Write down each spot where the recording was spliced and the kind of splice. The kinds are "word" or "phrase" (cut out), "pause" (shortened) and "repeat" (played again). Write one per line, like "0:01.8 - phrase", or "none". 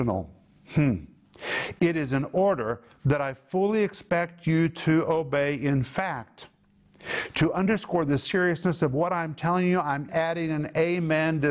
0:10.1 - word